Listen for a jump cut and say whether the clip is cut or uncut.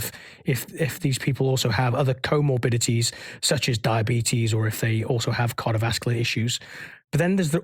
uncut